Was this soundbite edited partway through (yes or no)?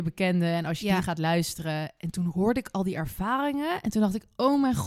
no